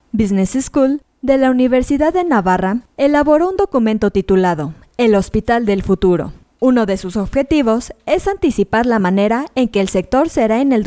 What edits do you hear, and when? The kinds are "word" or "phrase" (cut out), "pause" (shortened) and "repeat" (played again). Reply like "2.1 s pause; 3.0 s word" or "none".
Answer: none